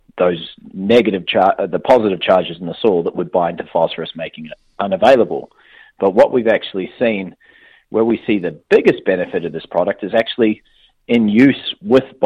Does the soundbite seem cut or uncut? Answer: uncut